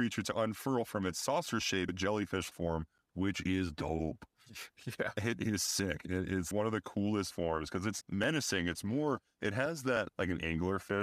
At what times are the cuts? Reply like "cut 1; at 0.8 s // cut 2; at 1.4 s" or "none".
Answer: cut 1; at 1.9 s // cut 2; at 2.5 s // cut 3; at 6.5 s // cut 4; at 7.3 s // cut 5; at 8.0 s // cut 6; at 10.1 s